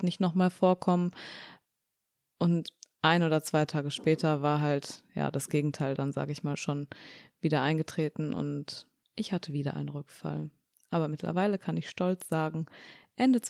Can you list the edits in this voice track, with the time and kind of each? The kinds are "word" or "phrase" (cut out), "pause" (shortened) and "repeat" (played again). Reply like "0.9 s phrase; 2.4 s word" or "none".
none